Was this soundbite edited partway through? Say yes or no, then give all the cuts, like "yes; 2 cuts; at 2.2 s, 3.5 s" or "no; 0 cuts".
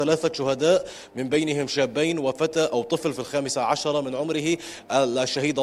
no; 0 cuts